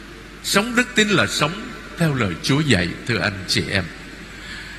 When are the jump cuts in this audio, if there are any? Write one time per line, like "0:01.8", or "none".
none

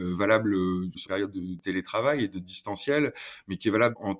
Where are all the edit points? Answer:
0:01.1

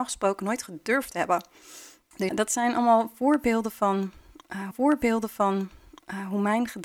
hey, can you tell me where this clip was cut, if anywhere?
0:02.3
0:04.7

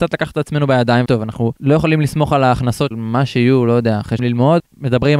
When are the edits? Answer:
0:01.1
0:02.9
0:04.2

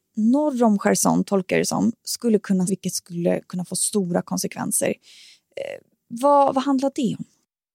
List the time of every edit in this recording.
0:02.7

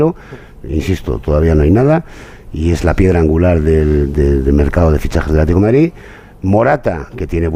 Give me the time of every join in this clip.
none

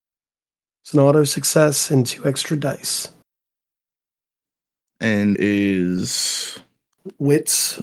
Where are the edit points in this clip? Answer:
0:00.9
0:05.3

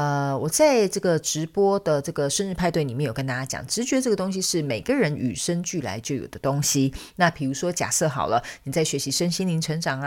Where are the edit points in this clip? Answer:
none

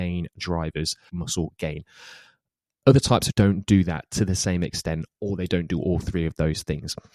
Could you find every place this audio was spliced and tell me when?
0:01.1
0:03.3

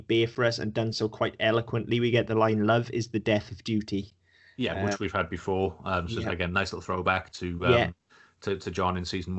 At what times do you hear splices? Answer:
none

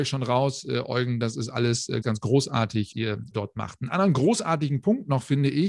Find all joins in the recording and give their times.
0:02.0
0:02.9
0:03.3

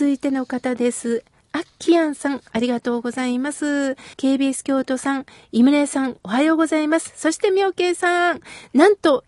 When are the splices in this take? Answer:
0:04.1

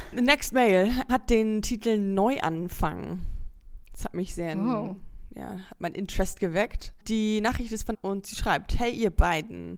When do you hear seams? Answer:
0:01.1
0:07.0
0:07.9

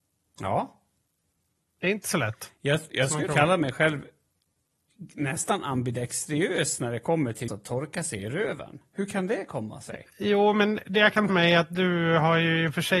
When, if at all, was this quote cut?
0:03.3
0:07.5
0:11.3

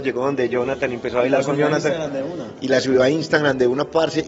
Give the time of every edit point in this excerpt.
none

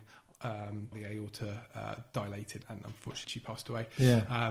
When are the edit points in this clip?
0:00.9
0:02.6
0:03.2

